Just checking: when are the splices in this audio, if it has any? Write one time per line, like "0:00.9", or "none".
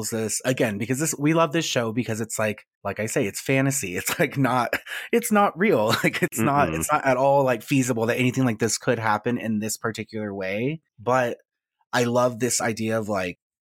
0:02.7
0:10.9